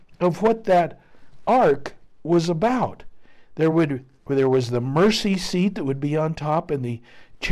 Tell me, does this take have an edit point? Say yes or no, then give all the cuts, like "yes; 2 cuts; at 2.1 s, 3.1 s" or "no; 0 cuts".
no; 0 cuts